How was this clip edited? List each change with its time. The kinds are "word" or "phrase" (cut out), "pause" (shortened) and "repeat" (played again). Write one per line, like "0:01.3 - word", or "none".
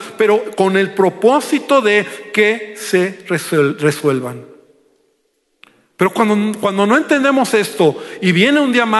none